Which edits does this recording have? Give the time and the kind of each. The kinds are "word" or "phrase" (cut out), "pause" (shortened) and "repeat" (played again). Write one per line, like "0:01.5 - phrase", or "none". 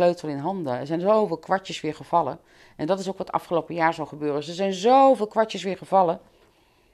none